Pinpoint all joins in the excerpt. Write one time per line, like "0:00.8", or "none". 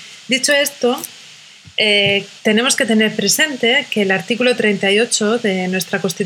0:02.4